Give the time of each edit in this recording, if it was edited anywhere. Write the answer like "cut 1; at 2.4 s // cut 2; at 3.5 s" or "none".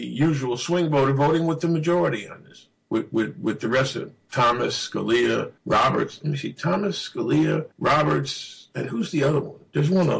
cut 1; at 5.6 s // cut 2; at 7.7 s